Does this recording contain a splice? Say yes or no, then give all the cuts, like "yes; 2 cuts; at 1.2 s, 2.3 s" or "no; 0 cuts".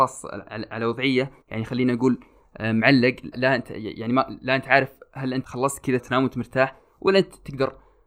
yes; 4 cuts; at 1.4 s, 3.3 s, 5.4 s, 6.0 s